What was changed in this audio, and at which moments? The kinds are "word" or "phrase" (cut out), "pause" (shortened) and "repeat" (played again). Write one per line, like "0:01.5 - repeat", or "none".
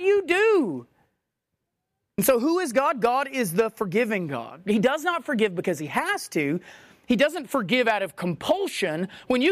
none